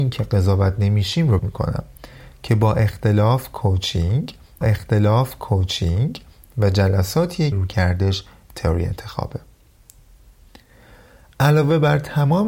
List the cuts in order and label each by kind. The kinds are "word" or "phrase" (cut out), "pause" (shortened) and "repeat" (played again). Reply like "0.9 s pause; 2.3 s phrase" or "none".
1.4 s word; 4.6 s repeat; 7.5 s word